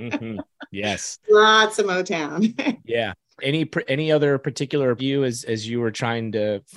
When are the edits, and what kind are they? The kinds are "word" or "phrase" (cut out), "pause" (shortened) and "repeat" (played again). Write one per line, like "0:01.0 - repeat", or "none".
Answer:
0:03.4 - word
0:05.0 - phrase